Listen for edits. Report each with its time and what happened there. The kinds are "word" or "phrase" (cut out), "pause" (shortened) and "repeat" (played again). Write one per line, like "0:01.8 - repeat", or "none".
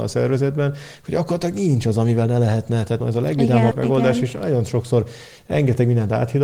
0:03.0 - phrase
0:03.7 - word

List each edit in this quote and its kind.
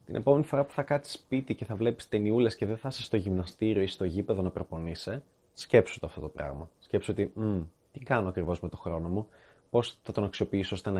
0:05.3 - pause

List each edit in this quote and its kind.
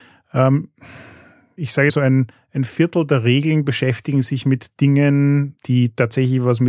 0:01.6 - word
0:01.9 - phrase
0:02.3 - pause
0:05.6 - word

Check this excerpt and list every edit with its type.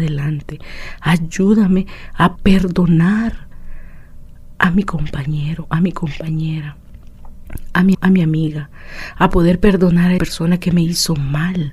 0:02.4 - word
0:07.9 - word
0:10.2 - word

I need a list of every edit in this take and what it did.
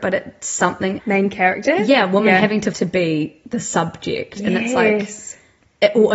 0:01.0 - word
0:02.7 - word

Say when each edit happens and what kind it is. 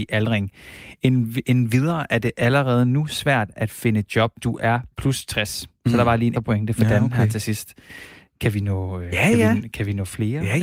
0:04.4 - word
0:06.3 - word

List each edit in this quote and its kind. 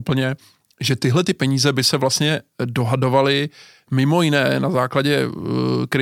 none

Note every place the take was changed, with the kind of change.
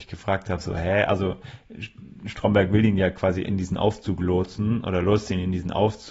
0:03.4 - word

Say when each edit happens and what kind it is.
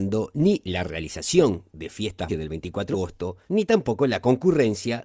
0:02.3 - phrase
0:02.9 - word

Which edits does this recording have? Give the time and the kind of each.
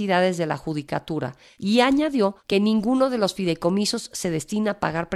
none

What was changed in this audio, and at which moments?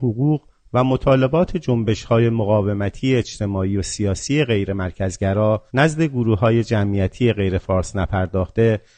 0:05.7 - pause

